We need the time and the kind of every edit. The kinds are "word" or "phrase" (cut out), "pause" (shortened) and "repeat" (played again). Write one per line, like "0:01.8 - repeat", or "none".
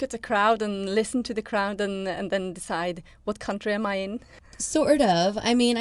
none